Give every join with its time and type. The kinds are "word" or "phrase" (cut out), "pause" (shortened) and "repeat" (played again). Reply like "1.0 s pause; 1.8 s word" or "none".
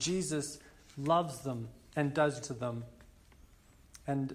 2.4 s word